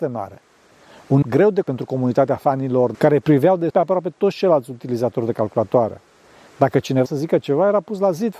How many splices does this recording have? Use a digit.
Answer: 5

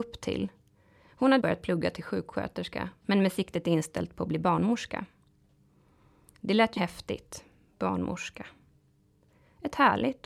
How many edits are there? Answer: 2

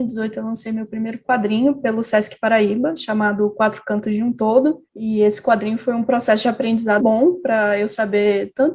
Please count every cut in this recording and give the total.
2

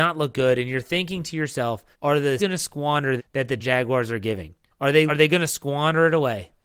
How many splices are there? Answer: 6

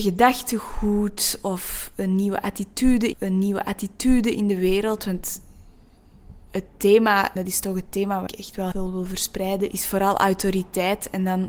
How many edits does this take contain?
6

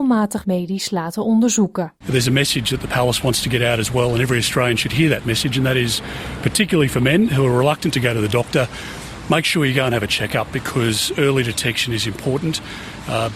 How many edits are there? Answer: 1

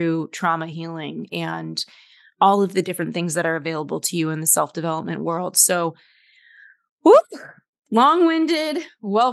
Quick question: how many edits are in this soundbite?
1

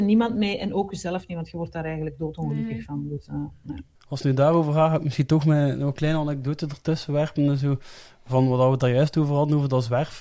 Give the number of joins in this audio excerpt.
0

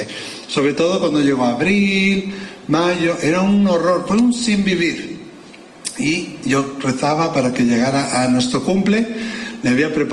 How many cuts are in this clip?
0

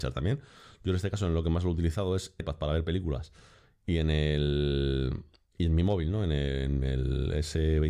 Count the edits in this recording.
1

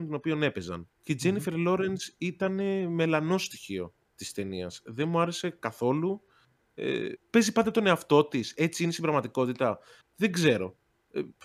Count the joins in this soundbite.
1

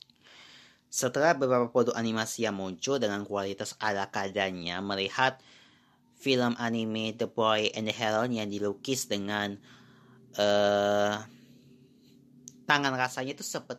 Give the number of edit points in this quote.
0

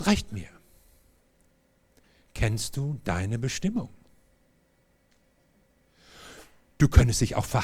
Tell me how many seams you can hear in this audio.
0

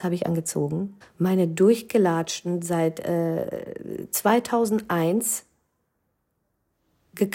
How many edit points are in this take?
1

